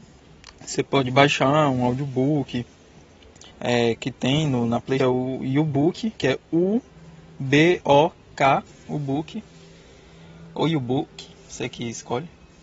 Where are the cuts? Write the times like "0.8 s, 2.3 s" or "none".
3.5 s, 5.0 s, 6.2 s, 7.8 s, 8.7 s